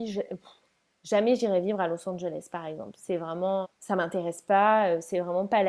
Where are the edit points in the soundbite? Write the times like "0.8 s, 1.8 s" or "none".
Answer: 3.6 s